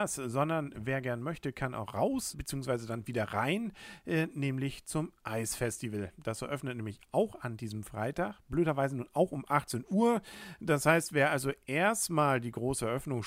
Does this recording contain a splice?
yes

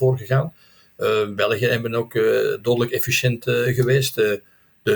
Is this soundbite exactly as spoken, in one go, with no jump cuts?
yes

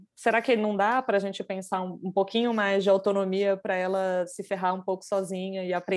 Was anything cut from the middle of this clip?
no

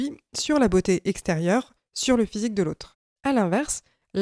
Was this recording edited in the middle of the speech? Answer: yes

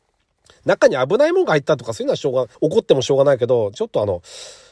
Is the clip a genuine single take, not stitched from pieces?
no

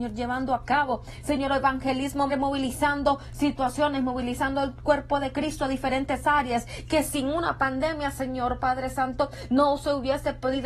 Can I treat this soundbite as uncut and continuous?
no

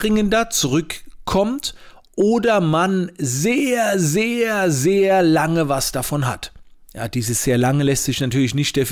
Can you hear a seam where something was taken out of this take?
no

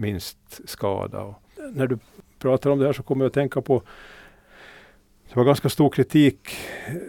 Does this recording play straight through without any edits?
yes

